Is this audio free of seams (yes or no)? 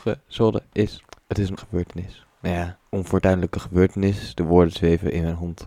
no